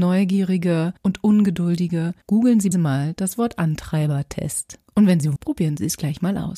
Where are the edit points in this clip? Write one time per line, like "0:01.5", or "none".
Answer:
0:01.0
0:02.2
0:02.7
0:04.8
0:05.4